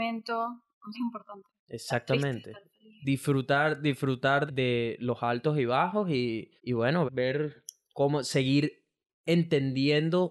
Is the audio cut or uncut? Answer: cut